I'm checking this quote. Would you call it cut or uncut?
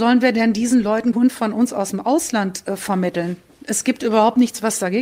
cut